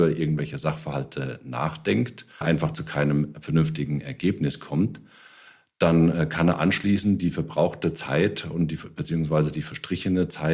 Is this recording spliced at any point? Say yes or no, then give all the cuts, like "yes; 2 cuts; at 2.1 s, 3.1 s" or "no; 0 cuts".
yes; 1 cut; at 2.4 s